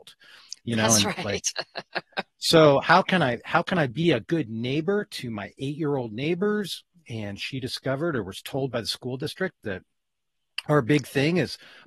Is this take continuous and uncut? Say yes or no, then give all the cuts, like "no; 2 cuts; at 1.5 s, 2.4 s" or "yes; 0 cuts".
yes; 0 cuts